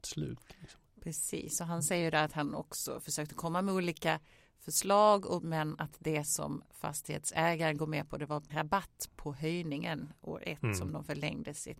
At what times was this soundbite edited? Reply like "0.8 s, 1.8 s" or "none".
5.4 s, 7.8 s, 8.5 s